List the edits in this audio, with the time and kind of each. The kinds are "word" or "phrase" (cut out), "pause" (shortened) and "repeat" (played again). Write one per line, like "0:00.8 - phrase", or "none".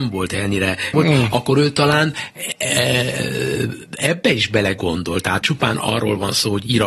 0:00.9 - phrase
0:05.4 - word